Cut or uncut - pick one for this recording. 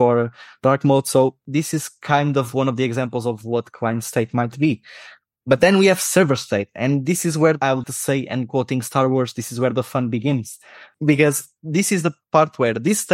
cut